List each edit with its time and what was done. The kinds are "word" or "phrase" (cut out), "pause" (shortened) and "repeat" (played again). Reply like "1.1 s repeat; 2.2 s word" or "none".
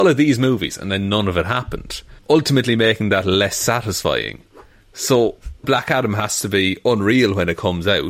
2.2 s word; 5.6 s word